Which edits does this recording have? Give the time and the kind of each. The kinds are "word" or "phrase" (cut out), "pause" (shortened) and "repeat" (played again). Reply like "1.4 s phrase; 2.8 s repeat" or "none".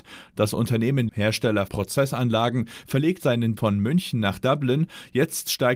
1.1 s word; 1.7 s word; 3.2 s word; 3.6 s word